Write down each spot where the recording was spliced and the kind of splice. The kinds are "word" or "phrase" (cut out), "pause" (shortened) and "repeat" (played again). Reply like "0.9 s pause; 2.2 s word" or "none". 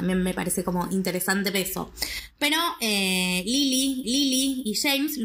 1.5 s word; 4.0 s repeat